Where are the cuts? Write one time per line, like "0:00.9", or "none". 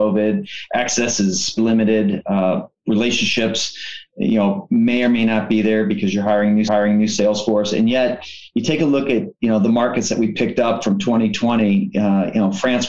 0:01.6
0:06.7